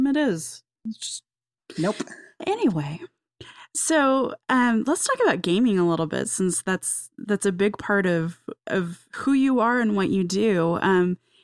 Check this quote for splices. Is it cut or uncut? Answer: cut